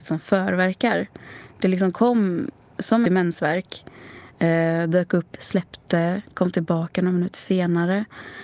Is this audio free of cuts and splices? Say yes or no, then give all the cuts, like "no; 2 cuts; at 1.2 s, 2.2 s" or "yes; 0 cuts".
no; 2 cuts; at 3.1 s, 5.4 s